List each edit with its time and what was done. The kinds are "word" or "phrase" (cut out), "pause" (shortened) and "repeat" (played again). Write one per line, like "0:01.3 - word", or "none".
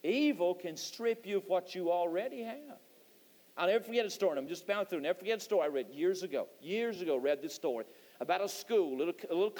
none